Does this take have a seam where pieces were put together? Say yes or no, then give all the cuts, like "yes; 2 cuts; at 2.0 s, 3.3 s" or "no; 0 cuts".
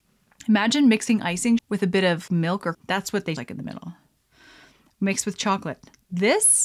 yes; 4 cuts; at 1.6 s, 2.3 s, 2.7 s, 3.4 s